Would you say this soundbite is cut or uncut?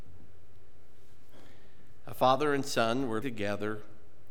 cut